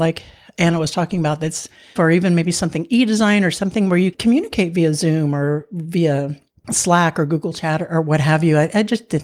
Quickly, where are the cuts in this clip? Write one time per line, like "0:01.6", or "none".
0:02.0
0:04.1